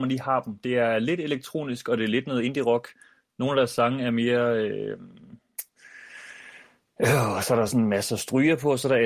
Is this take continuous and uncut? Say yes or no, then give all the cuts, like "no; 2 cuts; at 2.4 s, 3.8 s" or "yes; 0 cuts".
yes; 0 cuts